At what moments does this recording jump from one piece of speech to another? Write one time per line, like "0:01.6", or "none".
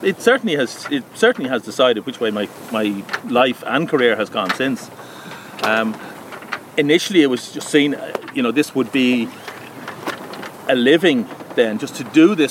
none